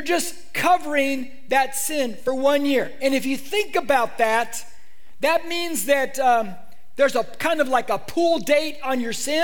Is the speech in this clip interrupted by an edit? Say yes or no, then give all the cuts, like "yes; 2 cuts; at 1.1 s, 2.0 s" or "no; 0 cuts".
no; 0 cuts